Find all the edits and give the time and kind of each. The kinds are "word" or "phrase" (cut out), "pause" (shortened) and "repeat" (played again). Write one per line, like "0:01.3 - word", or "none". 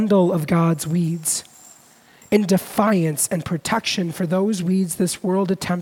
none